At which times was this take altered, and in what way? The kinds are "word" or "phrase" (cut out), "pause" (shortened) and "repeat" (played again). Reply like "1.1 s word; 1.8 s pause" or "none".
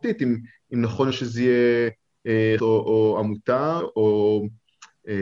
1.1 s word; 2.6 s word; 3.8 s word